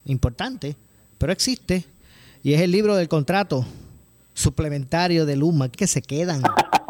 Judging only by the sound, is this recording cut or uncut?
cut